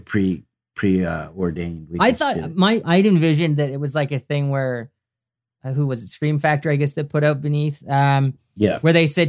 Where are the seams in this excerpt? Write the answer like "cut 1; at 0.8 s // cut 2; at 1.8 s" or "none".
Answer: cut 1; at 2.8 s